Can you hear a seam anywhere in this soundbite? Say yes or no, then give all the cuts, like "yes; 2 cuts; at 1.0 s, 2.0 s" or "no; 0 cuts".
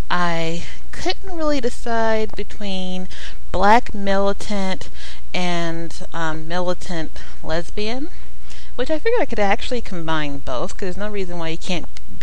no; 0 cuts